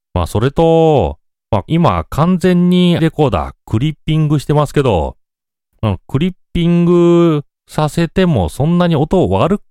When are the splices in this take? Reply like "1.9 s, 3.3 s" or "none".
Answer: 1.3 s, 1.7 s, 3.0 s